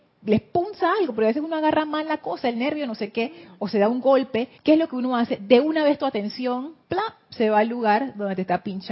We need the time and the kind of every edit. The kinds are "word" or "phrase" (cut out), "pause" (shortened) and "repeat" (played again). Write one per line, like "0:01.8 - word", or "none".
0:04.6 - pause
0:06.8 - pause